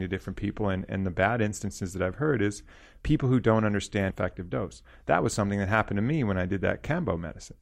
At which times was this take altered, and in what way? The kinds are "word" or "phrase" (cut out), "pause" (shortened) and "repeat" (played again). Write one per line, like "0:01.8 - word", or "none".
0:04.1 - word